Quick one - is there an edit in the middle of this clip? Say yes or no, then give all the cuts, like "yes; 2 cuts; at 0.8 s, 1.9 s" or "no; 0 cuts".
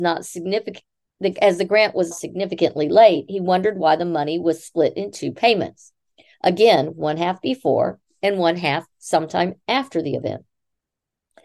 yes; 2 cuts; at 2.1 s, 8.9 s